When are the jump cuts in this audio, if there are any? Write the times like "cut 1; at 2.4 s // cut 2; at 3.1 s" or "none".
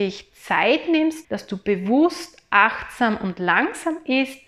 cut 1; at 1.2 s